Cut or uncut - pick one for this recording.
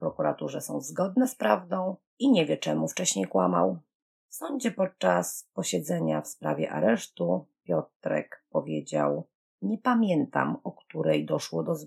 uncut